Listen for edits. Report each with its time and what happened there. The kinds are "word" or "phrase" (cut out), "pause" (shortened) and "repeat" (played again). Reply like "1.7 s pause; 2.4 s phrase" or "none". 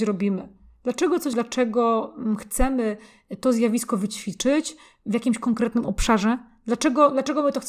1.3 s word